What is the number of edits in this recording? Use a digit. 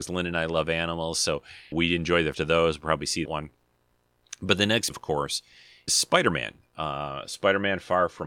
5